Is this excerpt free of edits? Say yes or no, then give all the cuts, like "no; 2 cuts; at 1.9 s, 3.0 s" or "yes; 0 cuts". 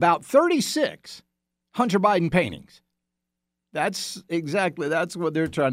yes; 0 cuts